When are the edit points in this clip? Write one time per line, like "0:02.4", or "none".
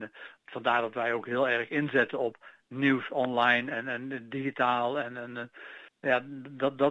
0:05.9